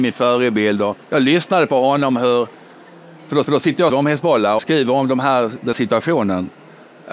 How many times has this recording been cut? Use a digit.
5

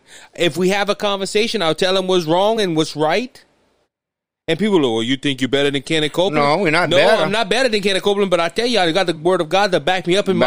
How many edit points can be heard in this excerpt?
0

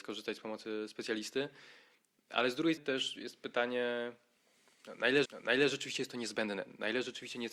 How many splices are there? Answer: 2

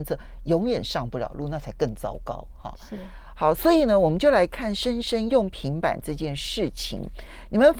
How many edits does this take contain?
0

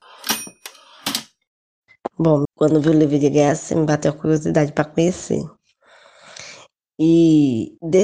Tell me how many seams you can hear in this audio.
1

